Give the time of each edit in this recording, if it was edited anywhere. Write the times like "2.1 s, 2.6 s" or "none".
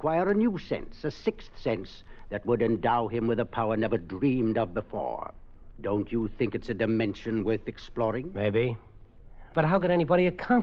none